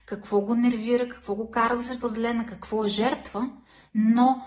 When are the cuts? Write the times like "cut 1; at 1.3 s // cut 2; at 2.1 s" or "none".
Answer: cut 1; at 2.0 s